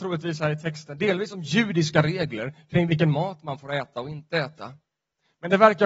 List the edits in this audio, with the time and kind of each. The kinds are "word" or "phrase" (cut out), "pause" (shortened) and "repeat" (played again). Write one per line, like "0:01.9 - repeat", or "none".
none

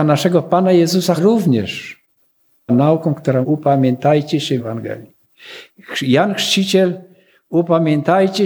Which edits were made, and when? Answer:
0:01.2 - word
0:02.7 - word
0:03.4 - word
0:04.6 - word

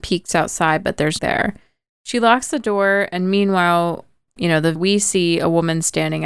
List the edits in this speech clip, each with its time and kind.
0:01.2 - word
0:04.4 - word
0:04.8 - word

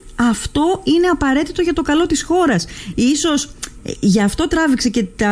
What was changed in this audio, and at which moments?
none

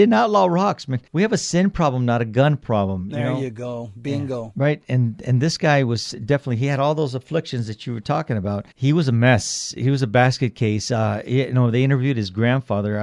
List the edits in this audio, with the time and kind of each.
0:01.1 - pause
0:08.7 - pause

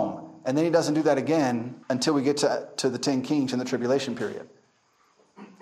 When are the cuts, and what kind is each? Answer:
0:01.8 - pause

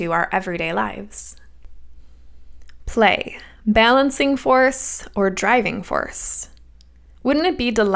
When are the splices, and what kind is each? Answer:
none

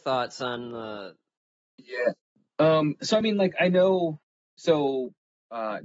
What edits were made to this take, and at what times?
none

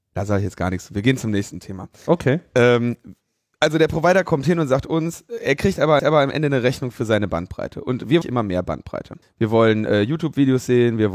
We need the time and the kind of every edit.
0:06.0 - repeat
0:08.2 - phrase
0:09.2 - pause

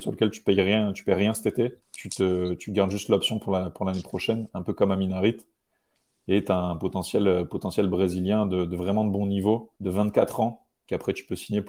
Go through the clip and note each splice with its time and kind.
0:01.8 - pause
0:09.8 - pause

